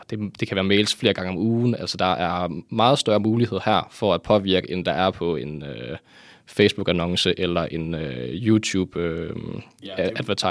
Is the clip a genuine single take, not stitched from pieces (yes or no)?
yes